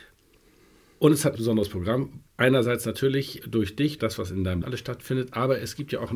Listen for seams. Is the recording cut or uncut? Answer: cut